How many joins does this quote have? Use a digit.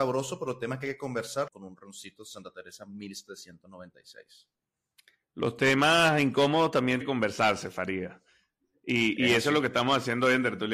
2